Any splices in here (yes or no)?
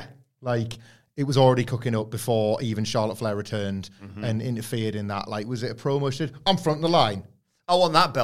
no